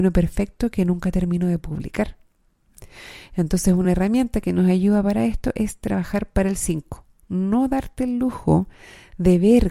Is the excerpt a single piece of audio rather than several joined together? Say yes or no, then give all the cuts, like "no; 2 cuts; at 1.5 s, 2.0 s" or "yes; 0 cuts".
yes; 0 cuts